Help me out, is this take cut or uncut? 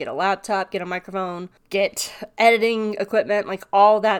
cut